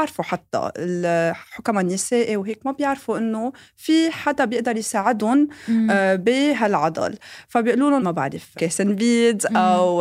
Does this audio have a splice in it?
yes; 2 cuts; at 8.0 s, 8.5 s

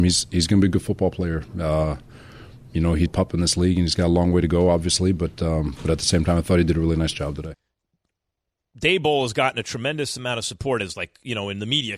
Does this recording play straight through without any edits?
no; 1 cut; at 3.1 s

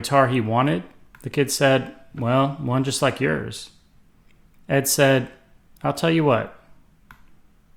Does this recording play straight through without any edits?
yes; 0 cuts

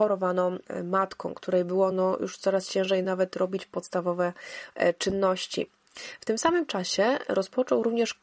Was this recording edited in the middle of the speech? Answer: no; 0 cuts

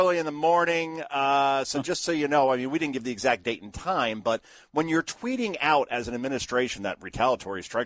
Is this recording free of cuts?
yes; 0 cuts

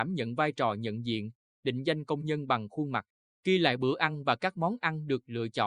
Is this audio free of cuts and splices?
yes; 0 cuts

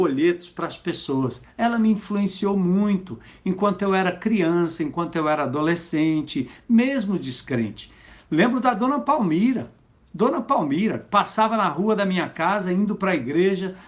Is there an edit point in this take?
no; 0 cuts

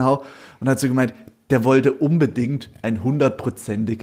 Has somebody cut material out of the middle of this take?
no; 0 cuts

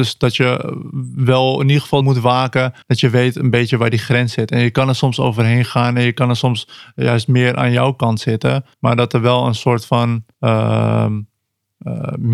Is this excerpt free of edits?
no; 4 cuts; at 2.0 s, 2.8 s, 8.7 s, 10.3 s

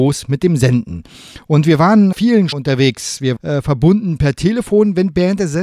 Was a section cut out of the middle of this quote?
yes; 3 cuts; at 2.1 s, 2.5 s, 3.4 s

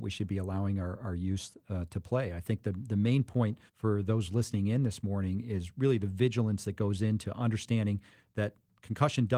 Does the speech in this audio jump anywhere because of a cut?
yes; 1 cut; at 3.7 s

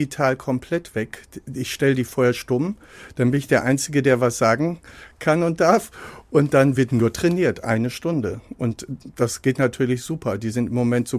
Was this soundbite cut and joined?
no; 0 cuts

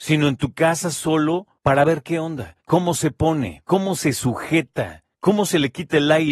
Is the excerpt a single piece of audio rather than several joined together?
no; 4 cuts; at 1.6 s, 2.6 s, 3.6 s, 5.1 s

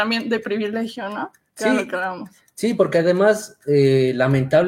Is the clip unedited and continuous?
yes; 0 cuts

